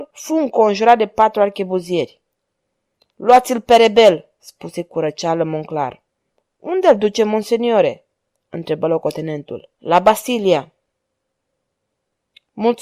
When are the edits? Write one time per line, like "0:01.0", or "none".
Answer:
0:06.3
0:09.7